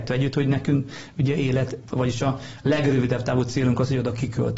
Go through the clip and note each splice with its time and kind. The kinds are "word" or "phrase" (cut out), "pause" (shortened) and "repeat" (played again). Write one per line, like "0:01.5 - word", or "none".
0:01.9 - word